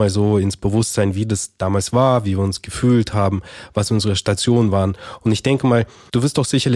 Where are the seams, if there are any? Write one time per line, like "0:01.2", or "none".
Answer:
none